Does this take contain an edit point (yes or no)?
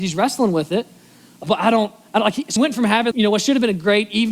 yes